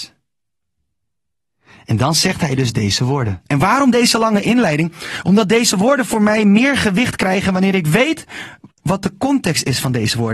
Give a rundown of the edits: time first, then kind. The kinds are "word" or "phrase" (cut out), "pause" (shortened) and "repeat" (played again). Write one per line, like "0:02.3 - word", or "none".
0:03.5 - pause
0:08.7 - pause